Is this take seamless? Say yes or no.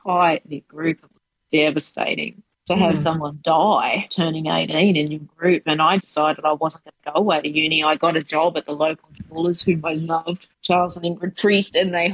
no